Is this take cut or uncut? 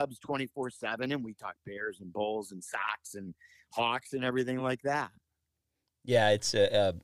uncut